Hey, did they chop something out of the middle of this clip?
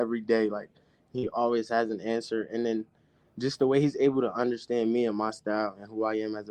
no; 0 cuts

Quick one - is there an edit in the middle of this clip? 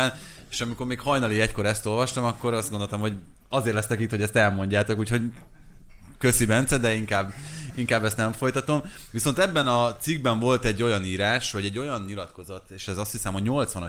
no; 0 cuts

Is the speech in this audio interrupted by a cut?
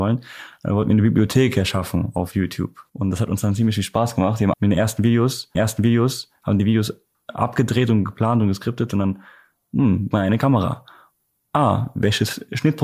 yes; 4 cuts; at 2.9 s, 4.5 s, 5.5 s, 10.1 s

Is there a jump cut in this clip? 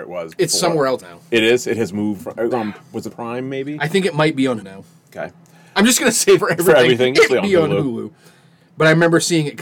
yes; 7 cuts; at 1.0 s, 2.2 s, 2.5 s, 3.1 s, 4.6 s, 6.4 s, 7.3 s

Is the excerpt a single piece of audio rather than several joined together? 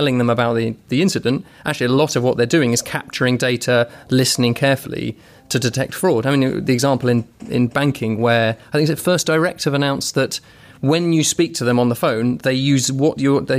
yes; 0 cuts

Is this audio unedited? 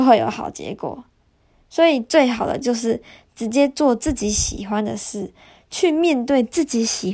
yes; 0 cuts

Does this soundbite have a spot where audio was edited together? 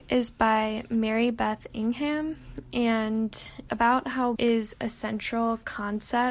yes; 2 cuts; at 3.7 s, 4.4 s

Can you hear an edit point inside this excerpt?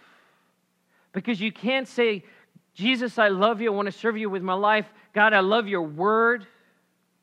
no; 0 cuts

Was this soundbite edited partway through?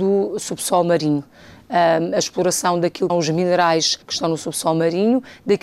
yes; 2 cuts; at 3.1 s, 4.0 s

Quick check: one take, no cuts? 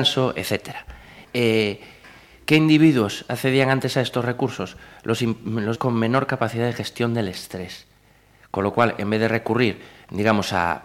no; 1 cut; at 5.7 s

